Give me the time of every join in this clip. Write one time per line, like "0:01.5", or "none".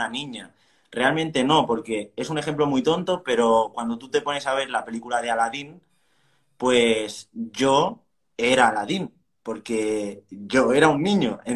none